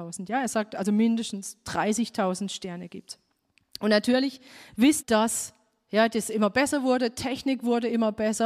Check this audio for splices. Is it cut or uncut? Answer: cut